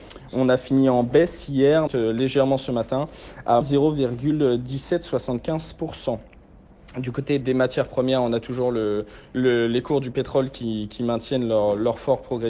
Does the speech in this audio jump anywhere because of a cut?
yes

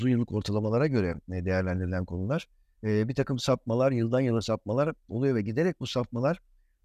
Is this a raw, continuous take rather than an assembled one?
yes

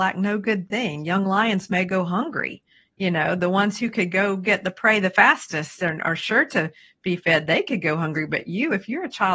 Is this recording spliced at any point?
no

